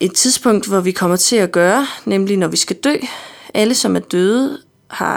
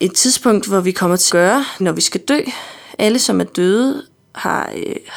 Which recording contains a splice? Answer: second; 2 cuts; at 1.3 s, 1.8 s

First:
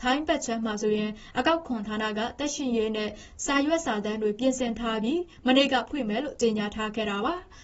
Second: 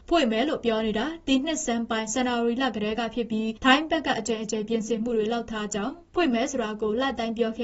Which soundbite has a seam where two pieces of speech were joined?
second; 1 cut; at 3.6 s

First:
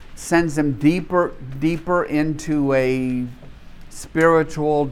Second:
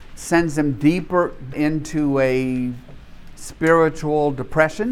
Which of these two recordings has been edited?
second; 1 cut; at 1.5 s

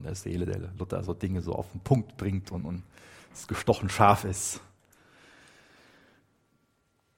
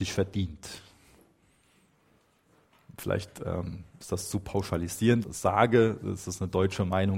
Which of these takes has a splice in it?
second; 1 cut; at 5.2 s

